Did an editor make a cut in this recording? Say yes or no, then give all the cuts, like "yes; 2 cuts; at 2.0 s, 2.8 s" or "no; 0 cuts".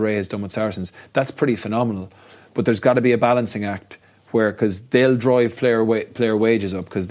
no; 0 cuts